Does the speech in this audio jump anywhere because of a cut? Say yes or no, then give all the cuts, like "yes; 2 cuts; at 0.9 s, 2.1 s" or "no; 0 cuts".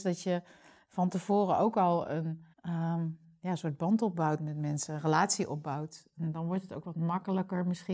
yes; 1 cut; at 2.5 s